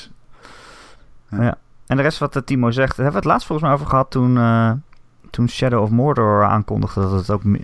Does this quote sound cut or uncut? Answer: uncut